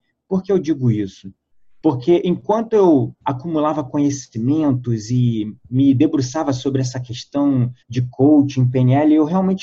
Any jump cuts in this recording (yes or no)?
yes